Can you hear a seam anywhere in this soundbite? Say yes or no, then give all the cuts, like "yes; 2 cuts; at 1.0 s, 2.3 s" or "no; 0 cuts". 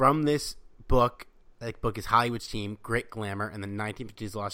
no; 0 cuts